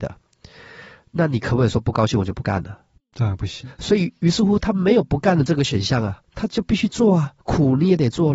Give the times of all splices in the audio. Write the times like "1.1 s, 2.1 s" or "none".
6.2 s, 7.4 s